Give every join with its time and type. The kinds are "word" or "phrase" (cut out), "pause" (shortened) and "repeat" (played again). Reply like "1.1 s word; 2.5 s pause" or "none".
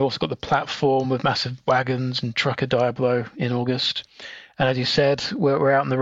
none